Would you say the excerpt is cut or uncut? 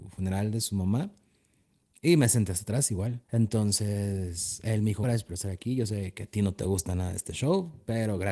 cut